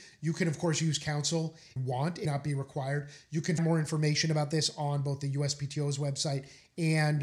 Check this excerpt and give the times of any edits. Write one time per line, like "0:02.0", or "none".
0:01.8
0:02.2
0:03.6

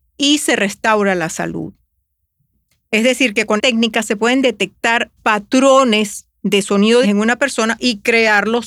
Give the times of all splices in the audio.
0:03.6
0:05.2
0:07.0

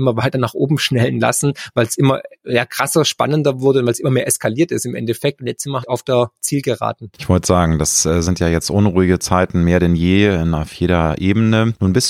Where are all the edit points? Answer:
0:05.8

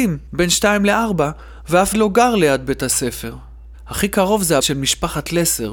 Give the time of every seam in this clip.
0:01.9
0:04.6

